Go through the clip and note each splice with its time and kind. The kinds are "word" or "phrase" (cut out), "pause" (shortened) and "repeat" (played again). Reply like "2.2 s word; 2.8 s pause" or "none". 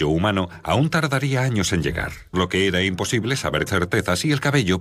2.3 s word; 3.7 s word